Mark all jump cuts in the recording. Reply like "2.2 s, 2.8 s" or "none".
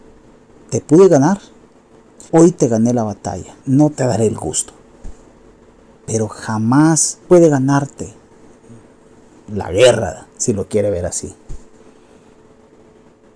2.3 s, 3.6 s, 7.2 s